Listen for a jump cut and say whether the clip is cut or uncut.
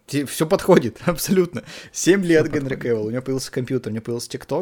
uncut